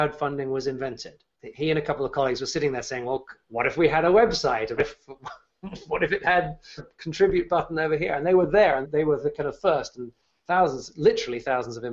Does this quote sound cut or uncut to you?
cut